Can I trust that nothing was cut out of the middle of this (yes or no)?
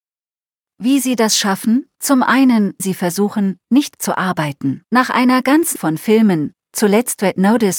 no